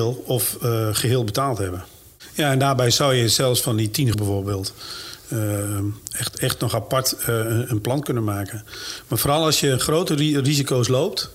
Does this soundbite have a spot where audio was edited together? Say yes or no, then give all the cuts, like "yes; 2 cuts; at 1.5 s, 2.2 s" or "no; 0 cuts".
yes; 1 cut; at 4.1 s